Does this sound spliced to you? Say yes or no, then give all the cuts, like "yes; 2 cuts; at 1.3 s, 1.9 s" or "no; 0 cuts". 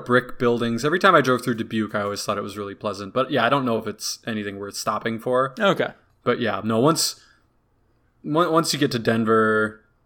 no; 0 cuts